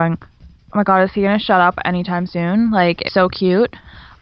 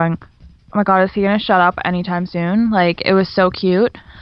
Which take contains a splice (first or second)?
first